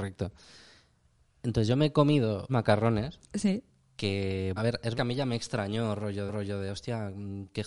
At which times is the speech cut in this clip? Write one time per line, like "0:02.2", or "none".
0:02.5
0:04.6
0:04.9
0:06.3

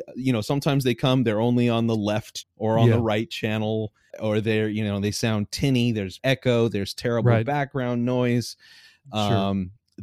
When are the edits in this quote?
0:02.4
0:04.1
0:06.2

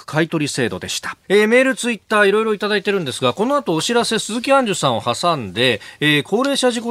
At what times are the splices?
0:01.2

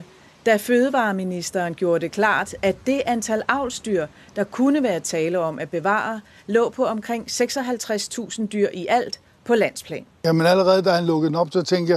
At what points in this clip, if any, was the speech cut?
none

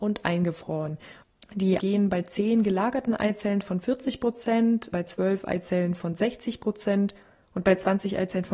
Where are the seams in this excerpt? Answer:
0:01.8
0:04.9

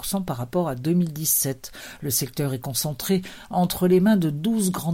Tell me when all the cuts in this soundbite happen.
none

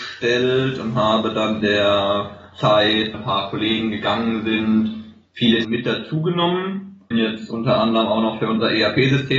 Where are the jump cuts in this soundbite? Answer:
0:01.6
0:03.1
0:05.6
0:07.1

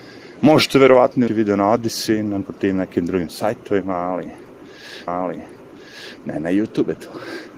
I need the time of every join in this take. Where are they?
0:01.3
0:02.5
0:05.1

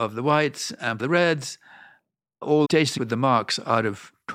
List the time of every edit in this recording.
0:01.0
0:02.6
0:03.0

